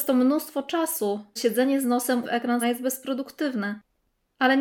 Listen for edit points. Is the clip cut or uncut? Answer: cut